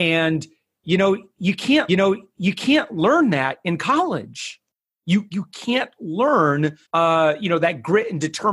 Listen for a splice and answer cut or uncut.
cut